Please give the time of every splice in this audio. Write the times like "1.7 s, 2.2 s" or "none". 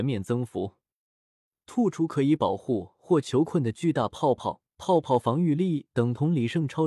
4.7 s